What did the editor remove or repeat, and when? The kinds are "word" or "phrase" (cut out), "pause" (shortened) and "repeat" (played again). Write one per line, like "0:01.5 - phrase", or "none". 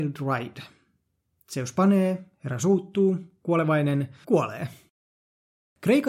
0:04.2 - word